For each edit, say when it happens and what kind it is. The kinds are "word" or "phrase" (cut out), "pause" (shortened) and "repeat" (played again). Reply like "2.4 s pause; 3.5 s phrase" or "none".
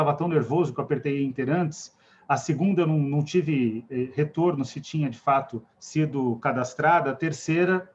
5.7 s pause